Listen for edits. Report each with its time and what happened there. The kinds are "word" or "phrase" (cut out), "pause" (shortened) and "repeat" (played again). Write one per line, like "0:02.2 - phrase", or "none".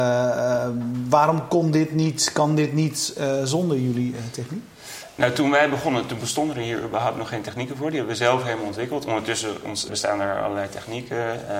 0:09.9 - word